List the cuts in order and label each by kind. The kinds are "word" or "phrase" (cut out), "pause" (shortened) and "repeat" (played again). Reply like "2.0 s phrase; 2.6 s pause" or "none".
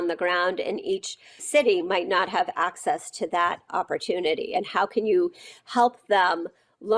1.4 s word; 3.7 s word